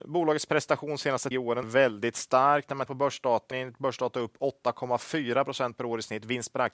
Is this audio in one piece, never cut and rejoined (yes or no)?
no